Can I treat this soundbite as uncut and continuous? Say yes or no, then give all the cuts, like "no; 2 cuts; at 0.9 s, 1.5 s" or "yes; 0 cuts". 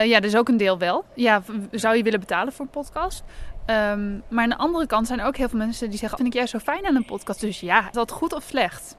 no; 3 cuts; at 1.1 s, 6.2 s, 7.9 s